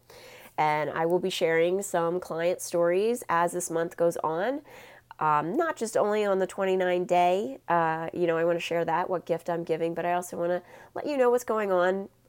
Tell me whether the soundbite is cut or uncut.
cut